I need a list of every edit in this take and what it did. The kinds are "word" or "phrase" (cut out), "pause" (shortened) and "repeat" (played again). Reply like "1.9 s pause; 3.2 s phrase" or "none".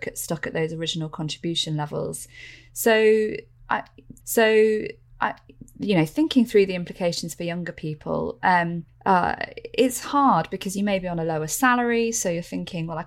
4.2 s repeat; 8.9 s pause